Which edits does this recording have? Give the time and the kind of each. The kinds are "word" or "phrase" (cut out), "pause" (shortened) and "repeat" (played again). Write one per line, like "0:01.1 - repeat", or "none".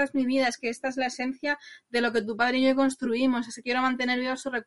none